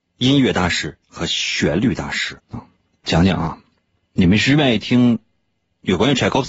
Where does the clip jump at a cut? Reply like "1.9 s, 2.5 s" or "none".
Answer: 2.4 s